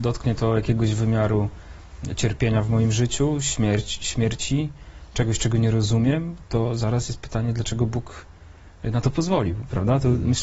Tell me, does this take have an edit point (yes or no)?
no